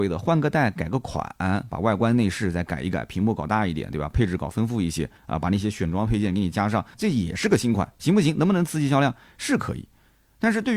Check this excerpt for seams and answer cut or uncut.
cut